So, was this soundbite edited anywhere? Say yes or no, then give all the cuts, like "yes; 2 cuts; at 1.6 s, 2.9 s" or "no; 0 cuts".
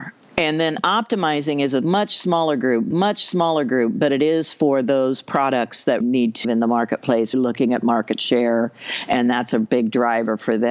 yes; 4 cuts; at 2.9 s, 6.0 s, 6.4 s, 7.3 s